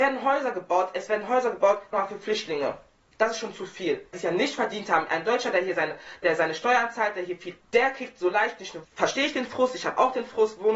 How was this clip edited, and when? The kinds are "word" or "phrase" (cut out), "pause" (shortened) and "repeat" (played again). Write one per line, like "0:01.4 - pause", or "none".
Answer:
0:01.9 - word
0:04.1 - word
0:07.6 - word
0:08.8 - word